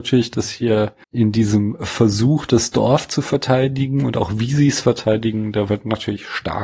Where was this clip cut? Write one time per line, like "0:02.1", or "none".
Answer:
0:01.0